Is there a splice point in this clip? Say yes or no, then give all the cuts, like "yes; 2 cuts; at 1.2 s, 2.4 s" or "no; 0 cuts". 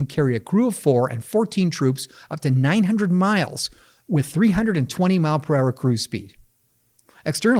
no; 0 cuts